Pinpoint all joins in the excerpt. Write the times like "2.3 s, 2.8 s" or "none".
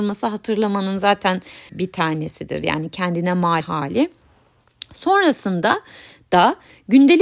1.7 s, 3.6 s